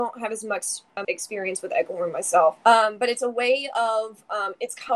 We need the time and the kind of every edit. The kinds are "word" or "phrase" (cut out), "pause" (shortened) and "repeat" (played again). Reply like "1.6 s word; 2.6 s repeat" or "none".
1.0 s word; 2.6 s pause